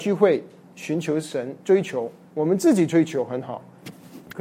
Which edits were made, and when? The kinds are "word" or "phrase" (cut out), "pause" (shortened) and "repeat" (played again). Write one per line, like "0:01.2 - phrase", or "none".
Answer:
0:01.6 - pause